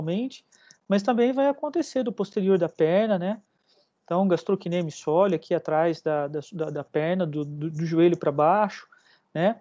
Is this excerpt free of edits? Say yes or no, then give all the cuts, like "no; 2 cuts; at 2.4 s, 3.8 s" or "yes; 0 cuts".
yes; 0 cuts